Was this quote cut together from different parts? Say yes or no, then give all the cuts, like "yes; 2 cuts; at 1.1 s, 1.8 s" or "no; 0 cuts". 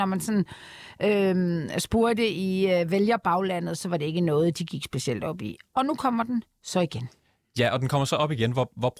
no; 0 cuts